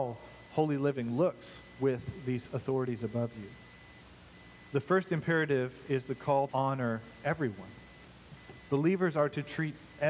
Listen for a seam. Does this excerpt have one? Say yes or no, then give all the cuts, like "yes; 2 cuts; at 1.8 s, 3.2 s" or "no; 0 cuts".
yes; 1 cut; at 6.5 s